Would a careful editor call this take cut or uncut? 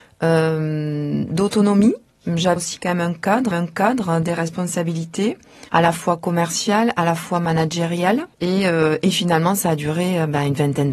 cut